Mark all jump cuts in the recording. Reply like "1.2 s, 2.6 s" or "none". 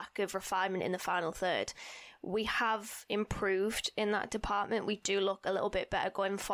none